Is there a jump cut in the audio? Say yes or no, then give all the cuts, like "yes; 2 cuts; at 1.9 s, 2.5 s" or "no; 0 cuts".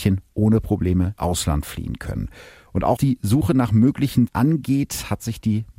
yes; 3 cuts; at 1.2 s, 3.0 s, 4.3 s